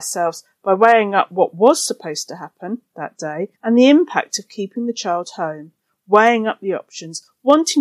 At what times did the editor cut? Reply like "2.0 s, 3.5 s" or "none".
3.5 s

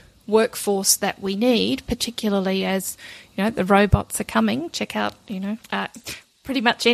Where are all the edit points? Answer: 5.6 s

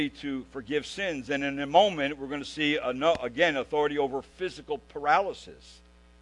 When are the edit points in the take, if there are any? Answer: none

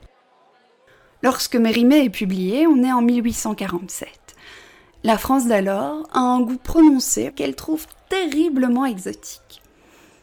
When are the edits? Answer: 7.3 s

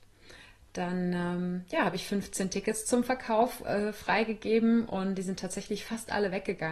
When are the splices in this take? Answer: none

